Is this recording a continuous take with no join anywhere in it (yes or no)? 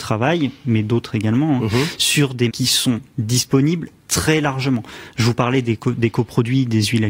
no